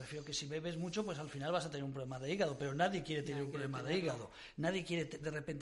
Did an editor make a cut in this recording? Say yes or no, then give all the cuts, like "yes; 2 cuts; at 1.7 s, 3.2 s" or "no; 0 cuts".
no; 0 cuts